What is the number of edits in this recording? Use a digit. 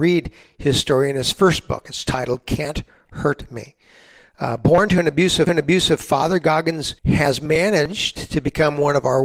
2